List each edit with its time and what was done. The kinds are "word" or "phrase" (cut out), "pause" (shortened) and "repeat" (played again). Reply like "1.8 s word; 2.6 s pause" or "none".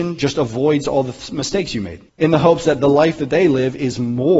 2.1 s pause

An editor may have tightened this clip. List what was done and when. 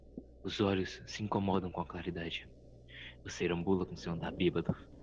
3.4 s word

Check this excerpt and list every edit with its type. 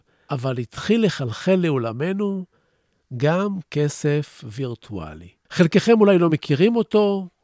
none

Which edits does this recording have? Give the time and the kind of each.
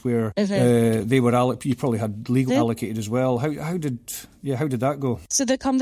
2.5 s word

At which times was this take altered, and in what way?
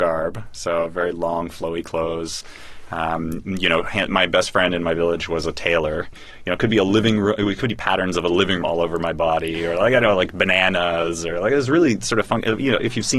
8.6 s word

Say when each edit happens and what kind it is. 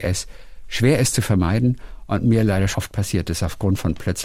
2.7 s word

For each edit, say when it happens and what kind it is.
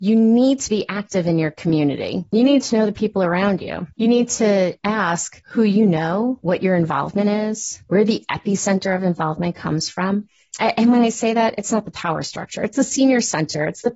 3.9 s pause

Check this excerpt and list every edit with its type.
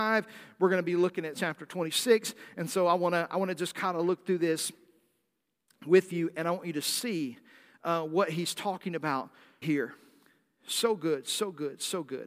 1.3 s phrase; 9.6 s word

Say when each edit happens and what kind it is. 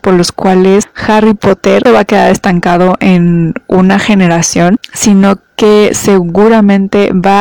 1.9 s phrase

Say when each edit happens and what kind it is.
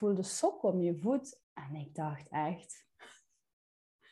1.4 s pause

